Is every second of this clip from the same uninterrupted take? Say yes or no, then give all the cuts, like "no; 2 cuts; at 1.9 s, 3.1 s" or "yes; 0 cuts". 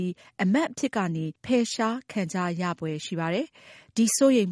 no; 1 cut; at 1.4 s